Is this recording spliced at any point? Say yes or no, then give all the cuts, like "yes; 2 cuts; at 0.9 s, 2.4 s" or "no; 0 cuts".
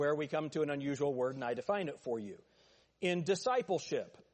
no; 0 cuts